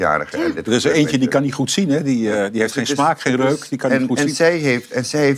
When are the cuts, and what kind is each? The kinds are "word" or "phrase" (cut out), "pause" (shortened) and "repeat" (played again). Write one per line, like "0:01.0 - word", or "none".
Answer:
none